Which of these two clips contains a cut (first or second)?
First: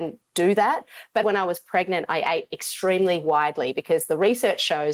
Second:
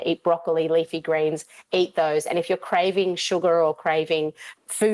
first